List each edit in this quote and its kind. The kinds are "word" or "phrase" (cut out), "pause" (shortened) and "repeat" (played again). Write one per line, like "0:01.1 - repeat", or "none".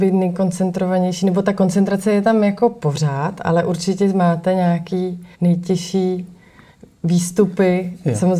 0:05.3 - pause